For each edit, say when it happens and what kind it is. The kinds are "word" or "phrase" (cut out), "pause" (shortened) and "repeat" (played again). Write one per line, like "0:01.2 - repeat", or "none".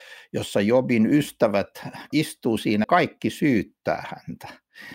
0:02.1 - word
0:02.8 - phrase